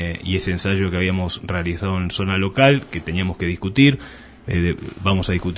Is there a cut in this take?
no; 0 cuts

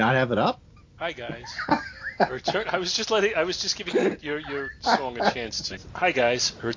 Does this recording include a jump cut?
yes; 1 cut; at 5.7 s

